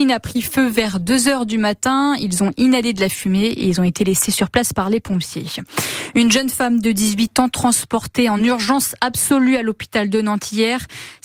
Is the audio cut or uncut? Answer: uncut